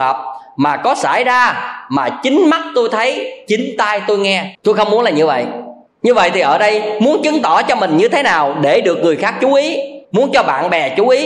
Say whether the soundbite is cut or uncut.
cut